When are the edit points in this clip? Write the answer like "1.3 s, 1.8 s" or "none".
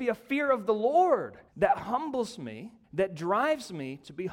1.5 s, 2.8 s